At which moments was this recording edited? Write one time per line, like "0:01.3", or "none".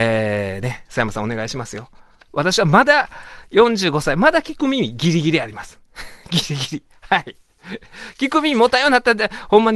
none